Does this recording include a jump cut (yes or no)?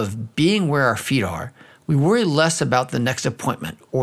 no